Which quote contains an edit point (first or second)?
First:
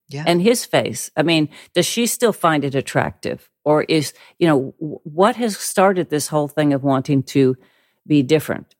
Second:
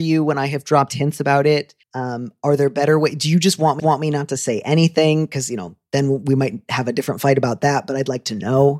second